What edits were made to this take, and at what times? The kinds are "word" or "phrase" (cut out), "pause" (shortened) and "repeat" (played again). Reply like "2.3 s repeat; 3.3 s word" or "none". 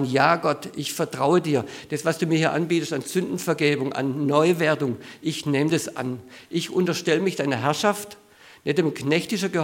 none